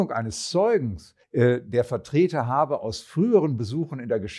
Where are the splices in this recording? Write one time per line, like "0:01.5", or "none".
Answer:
0:01.2